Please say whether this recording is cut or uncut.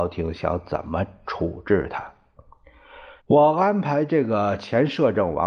cut